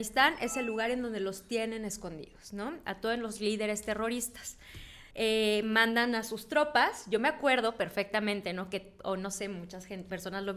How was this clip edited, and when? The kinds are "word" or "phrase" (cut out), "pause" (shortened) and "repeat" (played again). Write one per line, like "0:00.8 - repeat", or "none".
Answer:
0:05.1 - pause